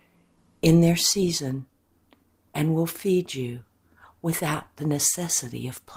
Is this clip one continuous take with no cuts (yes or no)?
yes